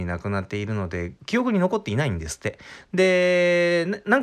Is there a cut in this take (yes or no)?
yes